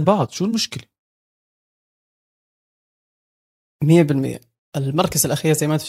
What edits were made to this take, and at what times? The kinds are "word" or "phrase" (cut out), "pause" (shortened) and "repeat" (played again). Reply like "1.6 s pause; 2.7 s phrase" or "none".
none